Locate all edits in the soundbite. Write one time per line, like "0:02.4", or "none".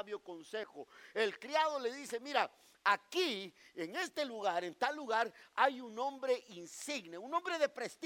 none